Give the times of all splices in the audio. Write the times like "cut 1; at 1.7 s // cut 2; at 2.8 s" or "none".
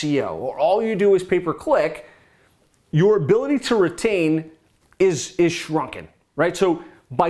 none